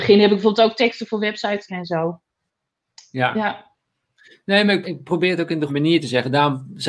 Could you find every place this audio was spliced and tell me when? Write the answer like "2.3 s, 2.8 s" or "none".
1.7 s, 4.8 s, 5.7 s